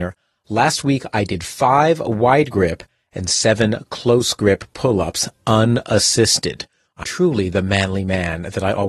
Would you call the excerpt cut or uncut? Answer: cut